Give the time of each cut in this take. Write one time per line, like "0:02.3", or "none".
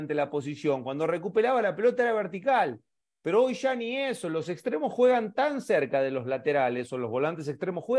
none